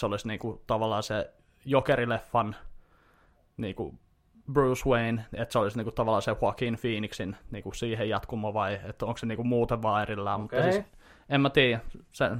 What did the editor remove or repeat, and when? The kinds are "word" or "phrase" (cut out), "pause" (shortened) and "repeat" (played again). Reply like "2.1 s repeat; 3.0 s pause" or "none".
none